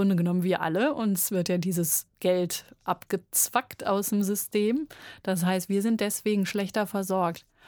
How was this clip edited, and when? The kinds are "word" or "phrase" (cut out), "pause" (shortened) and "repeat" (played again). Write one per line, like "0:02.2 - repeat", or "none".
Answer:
none